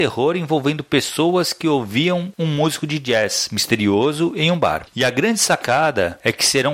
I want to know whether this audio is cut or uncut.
uncut